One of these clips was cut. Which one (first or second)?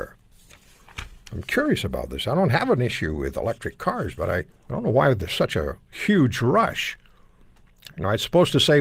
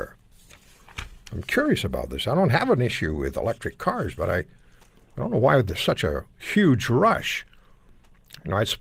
first